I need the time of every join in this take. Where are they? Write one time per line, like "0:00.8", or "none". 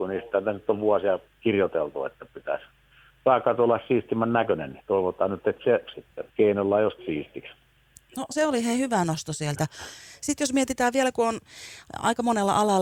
0:05.9
0:06.3
0:07.0